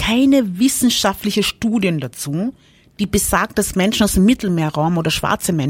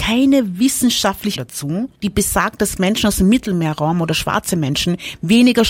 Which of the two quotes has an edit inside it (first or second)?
second